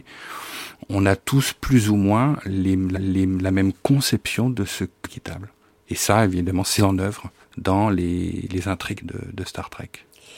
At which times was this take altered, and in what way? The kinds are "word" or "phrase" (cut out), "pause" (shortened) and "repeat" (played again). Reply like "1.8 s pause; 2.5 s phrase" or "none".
2.9 s repeat; 5.0 s phrase; 6.8 s word; 7.4 s pause; 9.0 s word